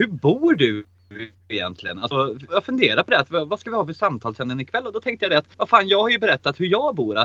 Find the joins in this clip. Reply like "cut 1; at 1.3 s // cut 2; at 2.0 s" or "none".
cut 1; at 1.4 s // cut 2; at 2.5 s // cut 3; at 5.5 s